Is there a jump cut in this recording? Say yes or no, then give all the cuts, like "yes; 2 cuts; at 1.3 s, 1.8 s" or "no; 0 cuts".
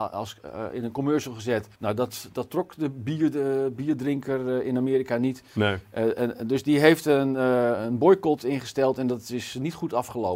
yes; 1 cut; at 1.7 s